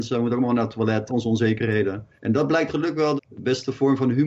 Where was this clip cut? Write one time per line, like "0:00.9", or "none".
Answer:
0:01.1
0:02.2
0:02.7
0:03.2